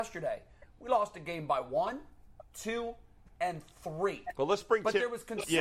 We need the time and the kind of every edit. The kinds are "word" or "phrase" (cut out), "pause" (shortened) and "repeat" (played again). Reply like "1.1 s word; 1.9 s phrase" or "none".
none